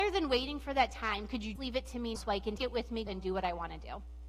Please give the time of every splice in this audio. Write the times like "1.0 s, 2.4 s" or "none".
1.6 s, 2.2 s, 2.6 s, 3.1 s